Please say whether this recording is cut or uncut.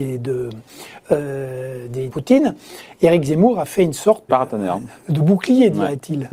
cut